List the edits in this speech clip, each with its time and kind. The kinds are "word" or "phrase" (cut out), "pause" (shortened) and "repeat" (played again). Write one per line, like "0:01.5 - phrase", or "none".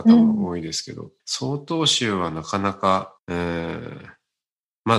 0:01.2 - pause
0:03.2 - pause